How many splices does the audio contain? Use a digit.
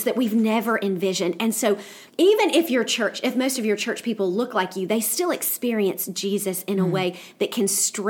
1